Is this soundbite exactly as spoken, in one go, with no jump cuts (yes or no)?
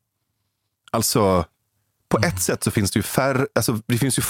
yes